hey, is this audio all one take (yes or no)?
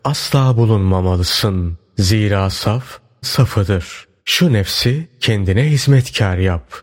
no